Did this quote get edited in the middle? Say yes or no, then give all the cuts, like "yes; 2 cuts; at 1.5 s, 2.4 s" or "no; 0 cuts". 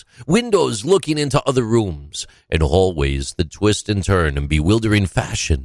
no; 0 cuts